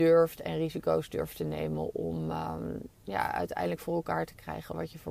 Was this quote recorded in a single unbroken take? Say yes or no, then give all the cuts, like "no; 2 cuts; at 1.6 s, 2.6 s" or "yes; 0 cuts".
yes; 0 cuts